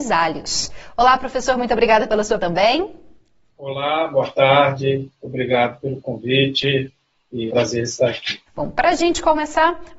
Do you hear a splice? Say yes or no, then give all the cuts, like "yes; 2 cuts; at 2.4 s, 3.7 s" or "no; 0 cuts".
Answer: yes; 3 cuts; at 2.4 s, 7.5 s, 8.5 s